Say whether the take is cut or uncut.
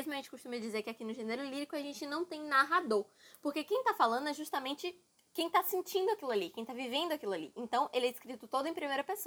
uncut